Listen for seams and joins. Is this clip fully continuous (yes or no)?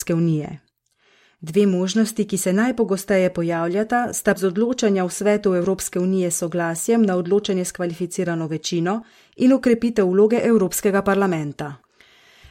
no